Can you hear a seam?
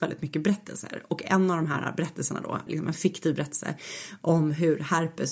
yes; 1 cut; at 2.7 s

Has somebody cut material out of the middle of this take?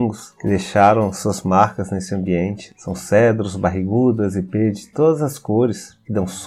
no; 0 cuts

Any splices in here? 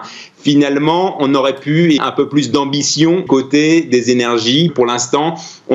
yes; 3 cuts; at 2.0 s, 3.3 s, 4.7 s

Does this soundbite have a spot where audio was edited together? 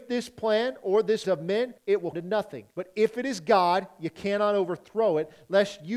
yes; 4 cuts; at 1.2 s, 1.8 s, 2.1 s, 2.7 s

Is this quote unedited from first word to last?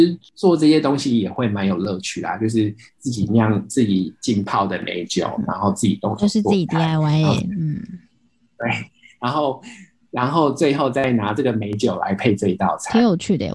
yes; 0 cuts

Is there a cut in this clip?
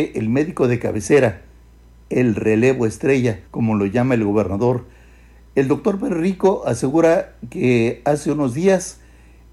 yes; 1 cut; at 3.5 s

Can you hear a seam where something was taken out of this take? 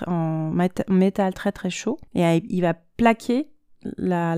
yes; 1 cut; at 2.1 s

